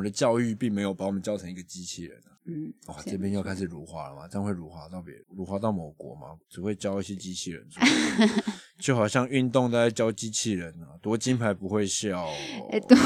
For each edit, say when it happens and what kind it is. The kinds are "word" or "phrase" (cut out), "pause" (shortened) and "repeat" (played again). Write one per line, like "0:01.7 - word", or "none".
0:02.4 - pause
0:05.2 - pause
0:06.4 - pause